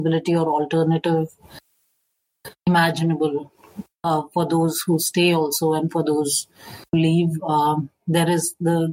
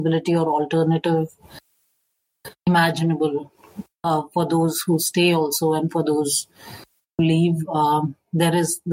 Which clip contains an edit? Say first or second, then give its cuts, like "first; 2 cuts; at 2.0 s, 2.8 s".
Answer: first; 1 cut; at 6.9 s